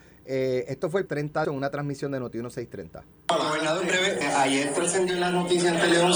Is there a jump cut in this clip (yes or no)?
yes